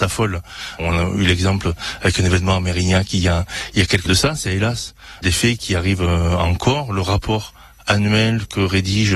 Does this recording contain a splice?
yes; 1 cut; at 4.1 s

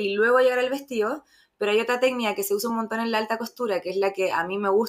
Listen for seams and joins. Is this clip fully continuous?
yes; 0 cuts

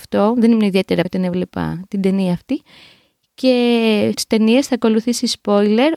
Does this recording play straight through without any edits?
no; 2 cuts; at 1.0 s, 4.1 s

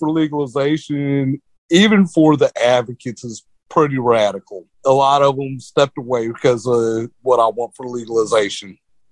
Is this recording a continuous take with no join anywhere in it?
no; 1 cut; at 4.7 s

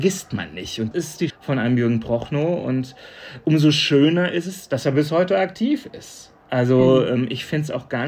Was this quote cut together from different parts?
yes; 2 cuts; at 0.9 s, 1.3 s

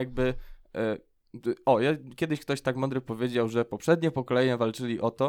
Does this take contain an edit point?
no; 0 cuts

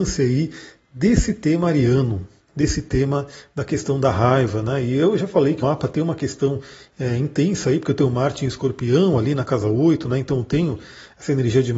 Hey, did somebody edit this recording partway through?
yes; 1 cut; at 5.6 s

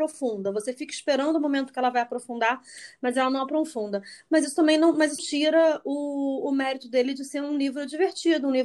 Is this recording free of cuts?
no; 1 cut; at 5.2 s

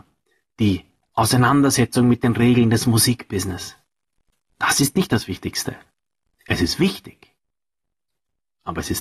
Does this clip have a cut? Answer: no; 0 cuts

